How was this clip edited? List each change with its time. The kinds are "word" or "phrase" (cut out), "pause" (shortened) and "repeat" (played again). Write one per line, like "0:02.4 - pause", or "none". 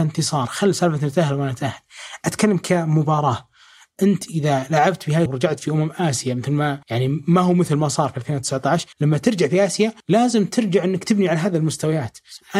0:05.3 - word
0:06.8 - pause
0:08.9 - pause
0:10.0 - pause